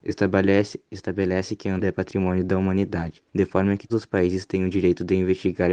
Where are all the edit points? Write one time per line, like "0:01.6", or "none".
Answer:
0:01.8
0:03.3
0:03.9